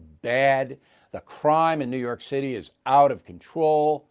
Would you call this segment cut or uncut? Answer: uncut